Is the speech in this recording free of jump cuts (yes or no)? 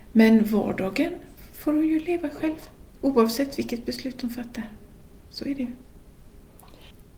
yes